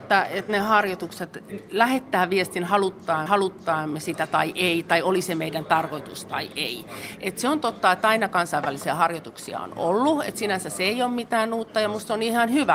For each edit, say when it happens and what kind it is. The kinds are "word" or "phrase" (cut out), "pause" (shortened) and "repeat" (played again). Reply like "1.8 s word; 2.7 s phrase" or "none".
3.3 s repeat